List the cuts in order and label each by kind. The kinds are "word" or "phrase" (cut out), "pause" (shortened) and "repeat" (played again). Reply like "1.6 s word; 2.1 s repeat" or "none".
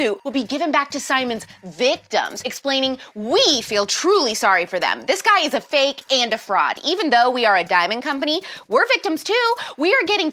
none